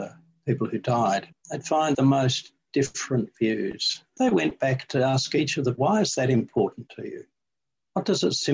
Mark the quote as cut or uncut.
cut